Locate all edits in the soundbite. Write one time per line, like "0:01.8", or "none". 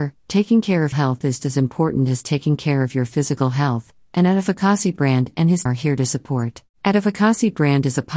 0:00.9
0:01.4
0:05.7
0:06.7